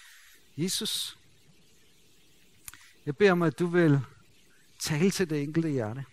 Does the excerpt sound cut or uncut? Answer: uncut